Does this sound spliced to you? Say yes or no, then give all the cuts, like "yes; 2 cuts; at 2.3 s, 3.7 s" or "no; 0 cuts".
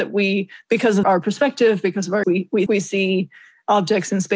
yes; 3 cuts; at 1.0 s, 2.2 s, 2.7 s